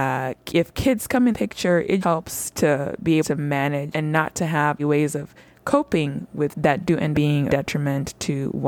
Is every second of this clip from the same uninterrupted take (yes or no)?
no